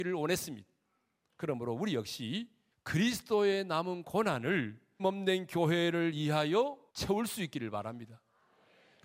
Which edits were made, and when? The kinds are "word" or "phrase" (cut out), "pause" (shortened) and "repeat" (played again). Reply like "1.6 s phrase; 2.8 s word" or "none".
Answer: 2.7 s pause; 5.0 s word; 6.9 s pause